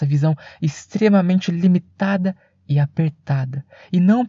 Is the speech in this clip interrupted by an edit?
no; 0 cuts

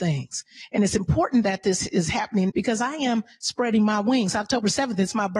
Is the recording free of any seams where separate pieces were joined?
no; 1 cut; at 2.5 s

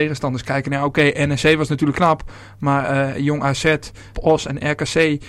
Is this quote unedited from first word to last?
no; 2 cuts; at 1.9 s, 4.1 s

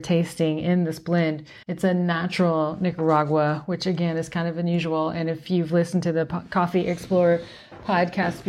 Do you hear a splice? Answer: yes; 1 cut; at 1.6 s

